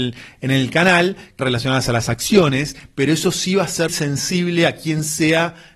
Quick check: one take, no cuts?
no; 2 cuts; at 1.4 s, 3.9 s

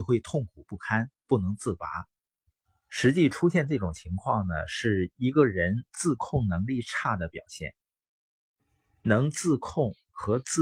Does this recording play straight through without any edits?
yes; 0 cuts

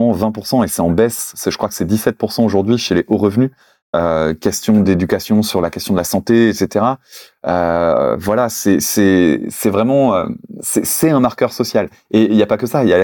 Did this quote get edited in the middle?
no; 0 cuts

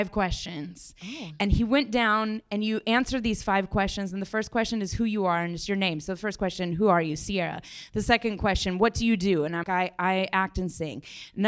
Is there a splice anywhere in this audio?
yes; 2 cuts; at 5.7 s, 9.6 s

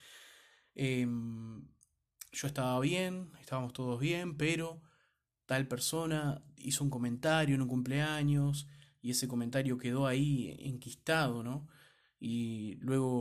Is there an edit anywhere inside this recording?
no; 0 cuts

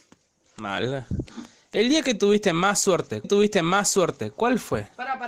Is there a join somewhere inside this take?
yes; 1 cut; at 3.2 s

